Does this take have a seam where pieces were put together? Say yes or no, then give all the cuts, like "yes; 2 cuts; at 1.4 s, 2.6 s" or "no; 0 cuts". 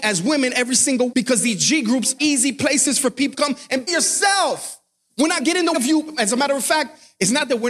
yes; 6 cuts; at 1.1 s, 2.2 s, 3.3 s, 3.9 s, 5.4 s, 5.7 s